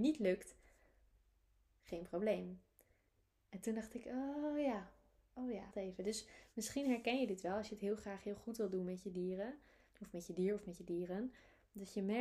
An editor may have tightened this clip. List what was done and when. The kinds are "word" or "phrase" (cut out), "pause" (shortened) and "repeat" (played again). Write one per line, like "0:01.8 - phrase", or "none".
0:05.7 - word